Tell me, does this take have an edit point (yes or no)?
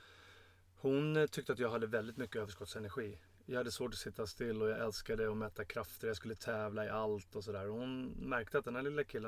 no